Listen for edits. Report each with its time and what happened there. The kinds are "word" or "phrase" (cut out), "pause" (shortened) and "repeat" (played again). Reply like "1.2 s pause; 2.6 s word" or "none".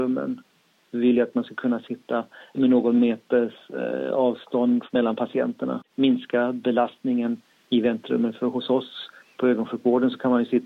none